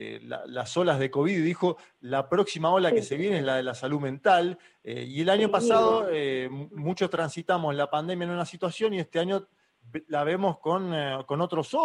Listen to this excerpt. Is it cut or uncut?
uncut